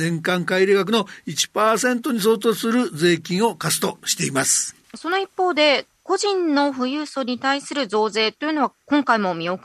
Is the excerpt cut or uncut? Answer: cut